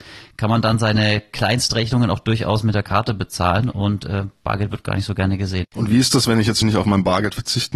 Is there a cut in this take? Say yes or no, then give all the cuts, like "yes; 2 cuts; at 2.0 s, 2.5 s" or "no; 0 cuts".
yes; 1 cut; at 6.6 s